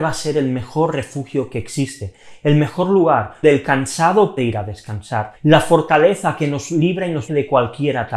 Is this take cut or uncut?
cut